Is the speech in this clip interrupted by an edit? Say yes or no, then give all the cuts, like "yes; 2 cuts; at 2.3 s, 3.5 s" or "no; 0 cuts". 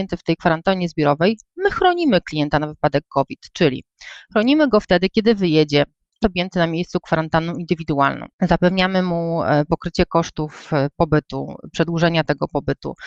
yes; 2 cuts; at 6.2 s, 8.3 s